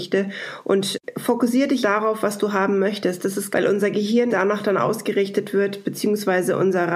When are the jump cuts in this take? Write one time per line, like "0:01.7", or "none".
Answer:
0:01.8
0:03.5
0:04.3